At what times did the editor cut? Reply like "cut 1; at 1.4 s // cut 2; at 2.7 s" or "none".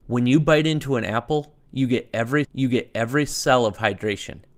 cut 1; at 2.4 s